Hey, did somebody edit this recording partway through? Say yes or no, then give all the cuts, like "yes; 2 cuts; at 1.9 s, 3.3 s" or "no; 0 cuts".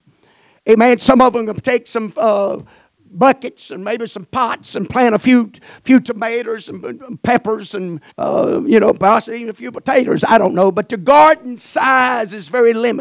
yes; 1 cut; at 8.1 s